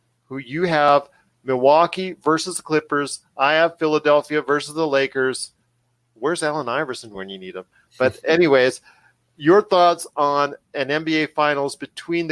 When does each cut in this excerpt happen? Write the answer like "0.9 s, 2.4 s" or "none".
none